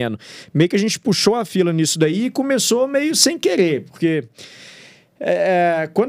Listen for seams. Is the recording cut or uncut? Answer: uncut